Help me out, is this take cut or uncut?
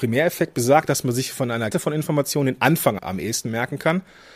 cut